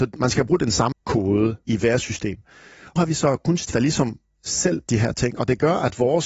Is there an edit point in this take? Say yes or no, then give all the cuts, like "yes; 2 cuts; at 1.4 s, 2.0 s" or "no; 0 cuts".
yes; 5 cuts; at 0.9 s, 1.7 s, 3.0 s, 3.7 s, 4.9 s